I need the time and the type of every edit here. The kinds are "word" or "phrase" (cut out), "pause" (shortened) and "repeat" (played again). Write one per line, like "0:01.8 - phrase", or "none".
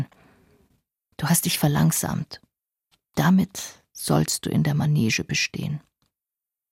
none